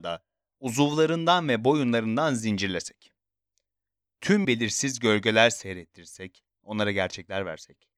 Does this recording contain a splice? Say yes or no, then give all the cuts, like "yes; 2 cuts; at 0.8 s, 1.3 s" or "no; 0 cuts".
yes; 1 cut; at 4.4 s